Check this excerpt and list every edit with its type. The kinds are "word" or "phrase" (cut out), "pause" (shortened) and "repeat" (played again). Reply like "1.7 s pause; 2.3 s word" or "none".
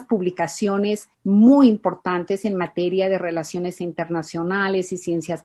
1.1 s pause

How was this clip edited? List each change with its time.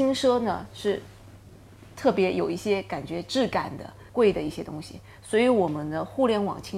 4.1 s pause

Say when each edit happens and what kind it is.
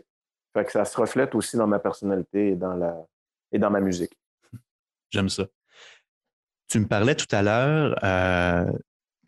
none

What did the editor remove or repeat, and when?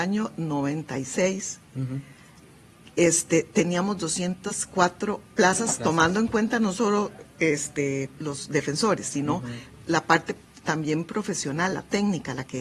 5.4 s word; 8.2 s word

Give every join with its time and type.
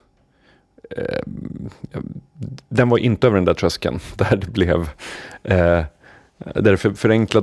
none

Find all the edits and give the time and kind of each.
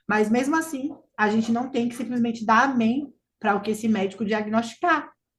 none

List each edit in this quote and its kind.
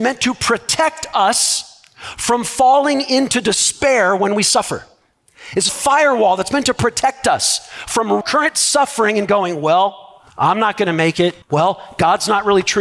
5.7 s phrase; 8.2 s phrase; 10.3 s pause; 11.4 s pause

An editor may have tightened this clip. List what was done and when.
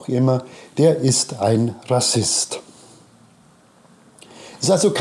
none

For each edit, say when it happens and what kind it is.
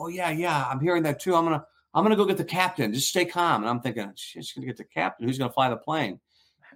none

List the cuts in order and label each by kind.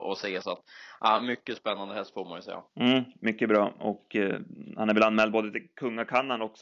2.7 s pause

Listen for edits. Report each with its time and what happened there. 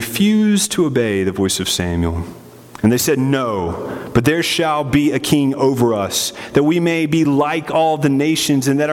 none

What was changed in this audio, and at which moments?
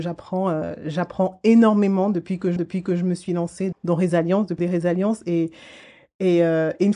2.6 s repeat; 3.7 s word; 4.6 s phrase

